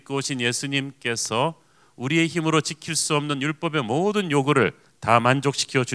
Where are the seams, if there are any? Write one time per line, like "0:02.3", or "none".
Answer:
none